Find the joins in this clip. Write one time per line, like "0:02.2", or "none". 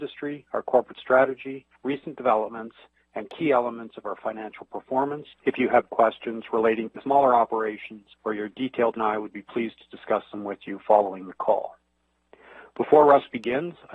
0:01.8
0:05.3
0:05.9
0:07.0
0:08.1
0:09.0